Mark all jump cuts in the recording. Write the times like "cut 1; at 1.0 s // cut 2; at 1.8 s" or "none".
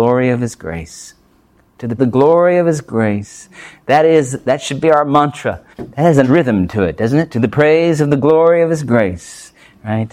cut 1; at 2.0 s // cut 2; at 5.7 s // cut 3; at 6.2 s